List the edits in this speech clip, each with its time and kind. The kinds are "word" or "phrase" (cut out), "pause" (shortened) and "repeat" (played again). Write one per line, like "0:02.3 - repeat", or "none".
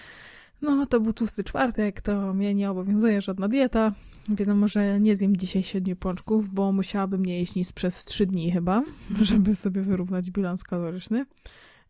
none